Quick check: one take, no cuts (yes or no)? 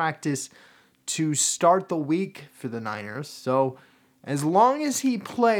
yes